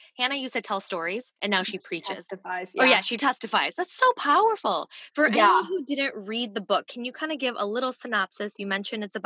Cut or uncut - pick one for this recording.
cut